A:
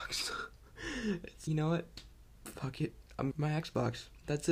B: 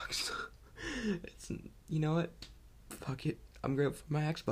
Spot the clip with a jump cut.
A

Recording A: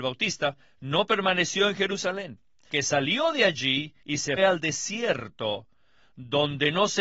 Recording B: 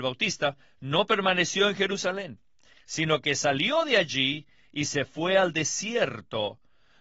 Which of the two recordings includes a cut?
A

